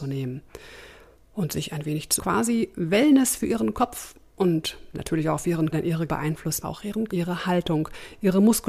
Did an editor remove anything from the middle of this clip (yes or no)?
yes